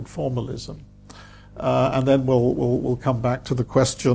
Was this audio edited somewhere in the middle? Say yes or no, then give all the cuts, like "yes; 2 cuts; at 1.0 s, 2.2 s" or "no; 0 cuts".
no; 0 cuts